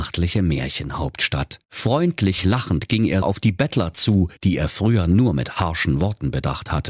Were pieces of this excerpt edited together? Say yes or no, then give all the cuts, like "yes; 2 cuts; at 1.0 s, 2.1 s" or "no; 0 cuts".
yes; 3 cuts; at 1.6 s, 3.2 s, 4.4 s